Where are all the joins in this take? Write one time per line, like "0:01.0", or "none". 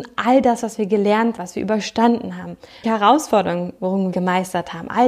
0:01.4
0:02.8
0:04.1